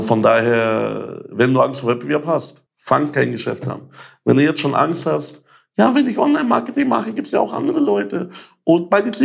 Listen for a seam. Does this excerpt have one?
yes; 1 cut; at 2.7 s

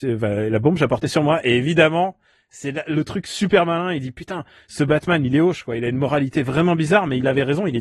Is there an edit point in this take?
no; 0 cuts

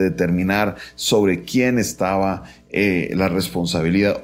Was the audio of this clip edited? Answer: no; 0 cuts

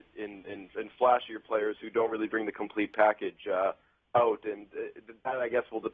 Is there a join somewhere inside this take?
no; 0 cuts

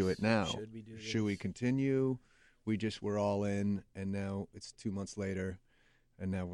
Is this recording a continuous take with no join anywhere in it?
yes; 0 cuts

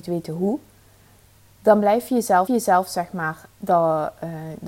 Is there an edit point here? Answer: yes; 1 cut; at 2.5 s

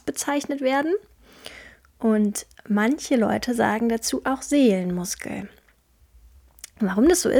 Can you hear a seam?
no; 0 cuts

